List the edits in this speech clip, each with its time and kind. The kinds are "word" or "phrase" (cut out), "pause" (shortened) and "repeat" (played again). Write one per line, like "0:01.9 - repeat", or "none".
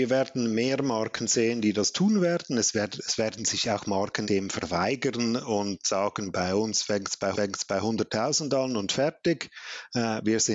0:04.2 - word
0:07.3 - repeat

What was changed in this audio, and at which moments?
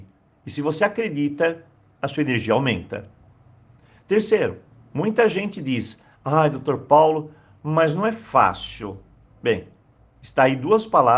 0:06.1 - pause

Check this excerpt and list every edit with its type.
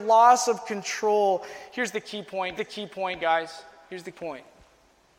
0:02.6 - repeat
0:04.1 - word

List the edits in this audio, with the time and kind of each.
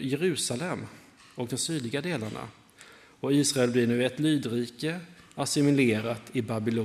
none

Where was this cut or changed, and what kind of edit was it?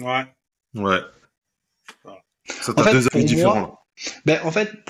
0:02.3 - pause
0:04.0 - pause

